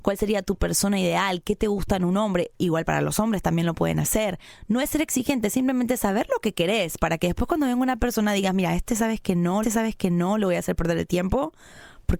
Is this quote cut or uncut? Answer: cut